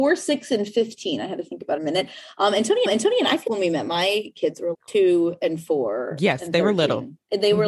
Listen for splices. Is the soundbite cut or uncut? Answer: cut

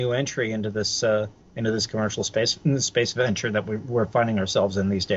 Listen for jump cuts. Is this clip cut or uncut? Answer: uncut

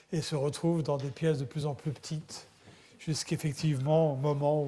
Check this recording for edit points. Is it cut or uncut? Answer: uncut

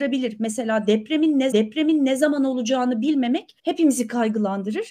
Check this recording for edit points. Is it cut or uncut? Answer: cut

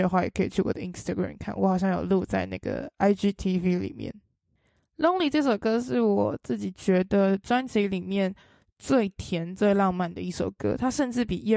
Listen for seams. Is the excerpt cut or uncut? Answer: uncut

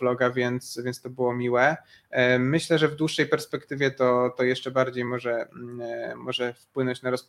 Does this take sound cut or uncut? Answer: uncut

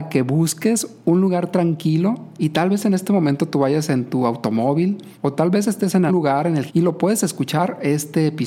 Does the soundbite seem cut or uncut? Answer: cut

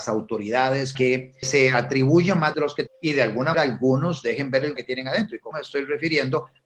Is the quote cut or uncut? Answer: cut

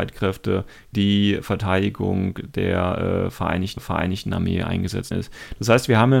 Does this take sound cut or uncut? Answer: cut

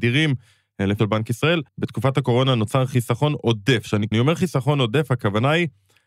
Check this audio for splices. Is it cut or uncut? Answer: cut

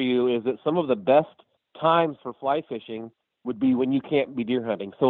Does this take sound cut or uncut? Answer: cut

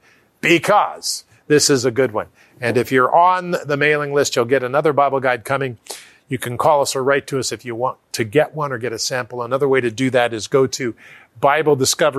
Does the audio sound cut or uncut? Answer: uncut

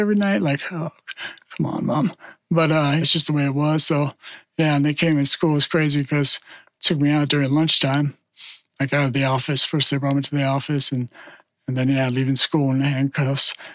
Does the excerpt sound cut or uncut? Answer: cut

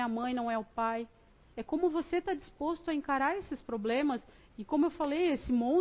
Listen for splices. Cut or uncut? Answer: uncut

